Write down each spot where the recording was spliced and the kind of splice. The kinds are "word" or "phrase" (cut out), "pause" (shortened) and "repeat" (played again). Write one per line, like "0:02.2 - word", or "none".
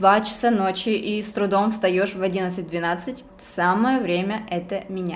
0:03.3 - pause